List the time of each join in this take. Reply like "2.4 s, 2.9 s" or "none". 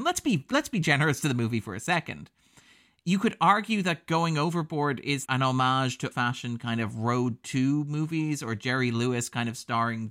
5.3 s, 6.1 s